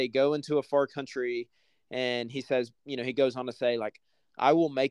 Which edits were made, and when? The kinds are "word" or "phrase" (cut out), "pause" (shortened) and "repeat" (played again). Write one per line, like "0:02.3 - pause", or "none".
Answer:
none